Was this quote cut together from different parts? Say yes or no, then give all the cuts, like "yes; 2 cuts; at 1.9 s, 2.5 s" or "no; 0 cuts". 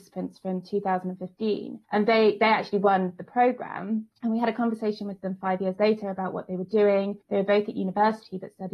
yes; 3 cuts; at 1.8 s, 4.1 s, 7.2 s